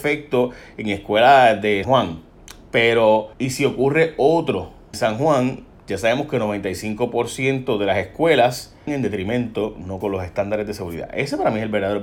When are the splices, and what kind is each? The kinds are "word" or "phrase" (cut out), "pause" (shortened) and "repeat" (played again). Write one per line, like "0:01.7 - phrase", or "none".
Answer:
0:01.8 - word
0:03.3 - pause
0:04.9 - word
0:08.9 - word
0:10.0 - word